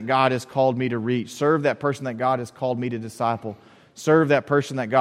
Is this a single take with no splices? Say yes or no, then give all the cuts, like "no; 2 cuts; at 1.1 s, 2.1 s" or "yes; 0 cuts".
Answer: yes; 0 cuts